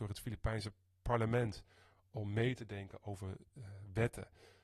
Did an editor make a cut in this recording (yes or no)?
no